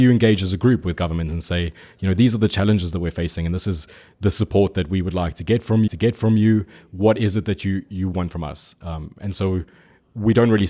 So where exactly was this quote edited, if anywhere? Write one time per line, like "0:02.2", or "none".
0:05.9